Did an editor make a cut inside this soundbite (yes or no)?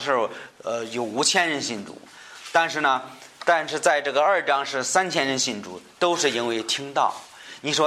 no